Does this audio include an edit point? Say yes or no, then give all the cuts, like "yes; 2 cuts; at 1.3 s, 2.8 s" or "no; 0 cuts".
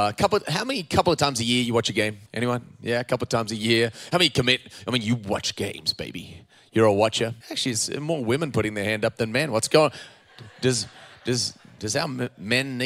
yes; 2 cuts; at 2.3 s, 7.4 s